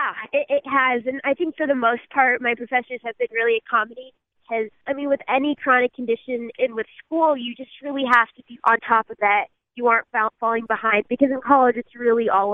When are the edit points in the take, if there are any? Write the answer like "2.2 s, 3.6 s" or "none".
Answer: 8.6 s, 9.2 s